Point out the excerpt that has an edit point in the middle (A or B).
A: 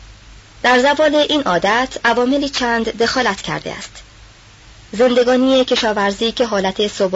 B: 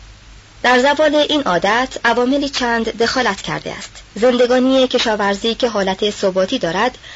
B